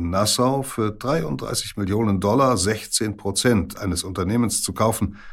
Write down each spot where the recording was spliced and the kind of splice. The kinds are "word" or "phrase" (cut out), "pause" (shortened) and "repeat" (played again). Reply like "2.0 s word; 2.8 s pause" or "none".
none